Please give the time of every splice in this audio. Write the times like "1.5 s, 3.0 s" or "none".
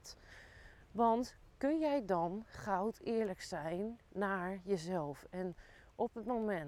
none